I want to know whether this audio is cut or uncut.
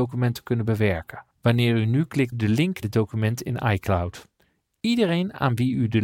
cut